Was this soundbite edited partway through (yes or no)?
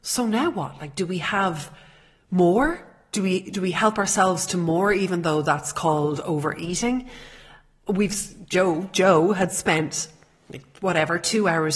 no